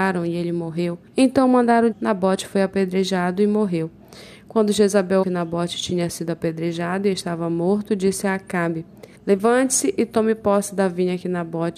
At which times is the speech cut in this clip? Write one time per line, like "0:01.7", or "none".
0:01.1
0:01.9
0:05.2
0:09.1